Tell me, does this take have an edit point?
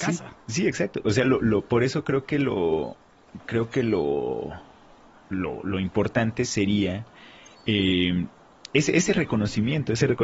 no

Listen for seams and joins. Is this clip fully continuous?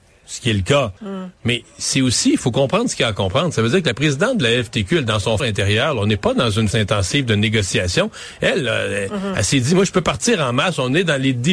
no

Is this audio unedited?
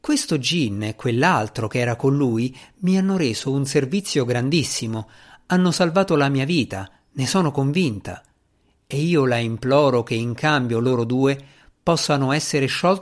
yes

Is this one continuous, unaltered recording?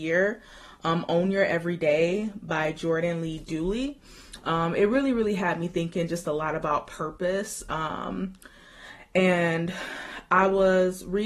yes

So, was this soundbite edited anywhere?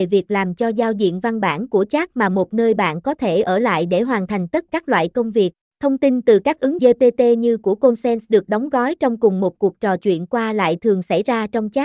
yes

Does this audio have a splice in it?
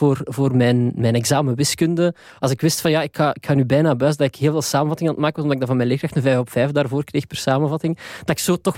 no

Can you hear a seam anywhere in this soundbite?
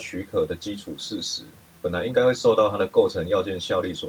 no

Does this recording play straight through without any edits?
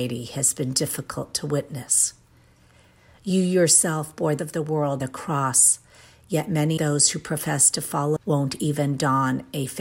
no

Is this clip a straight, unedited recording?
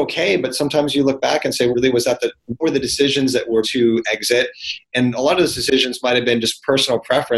no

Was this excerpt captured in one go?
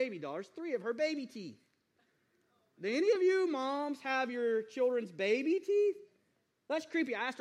yes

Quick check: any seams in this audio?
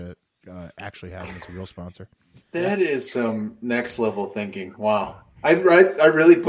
no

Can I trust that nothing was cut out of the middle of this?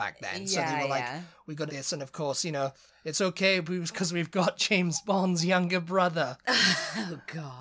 no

